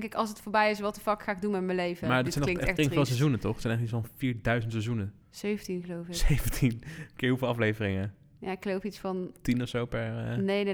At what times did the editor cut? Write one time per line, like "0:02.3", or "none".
0:02.8
0:05.2